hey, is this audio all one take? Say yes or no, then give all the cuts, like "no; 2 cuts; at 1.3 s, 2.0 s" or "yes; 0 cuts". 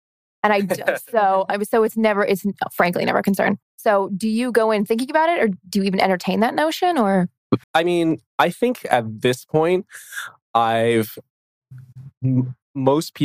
no; 3 cuts; at 3.6 s, 7.6 s, 8.3 s